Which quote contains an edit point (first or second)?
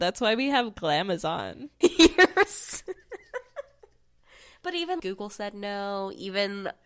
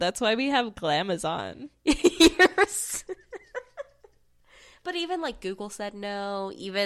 first